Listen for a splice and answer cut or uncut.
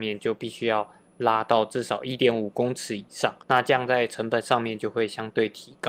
cut